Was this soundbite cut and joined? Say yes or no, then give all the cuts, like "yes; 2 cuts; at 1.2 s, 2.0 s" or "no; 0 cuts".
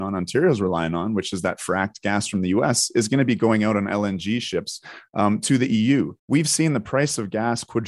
yes; 1 cut; at 6.2 s